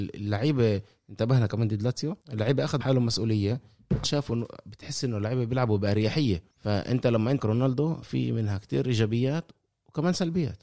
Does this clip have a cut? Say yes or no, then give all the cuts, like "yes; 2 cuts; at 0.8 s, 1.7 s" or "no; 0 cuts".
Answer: yes; 6 cuts; at 2.2 s, 2.8 s, 4.0 s, 6.5 s, 7.4 s, 8.0 s